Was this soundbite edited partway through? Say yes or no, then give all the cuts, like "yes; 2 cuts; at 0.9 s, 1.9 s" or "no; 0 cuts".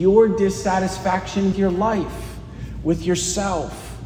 yes; 1 cut; at 1.5 s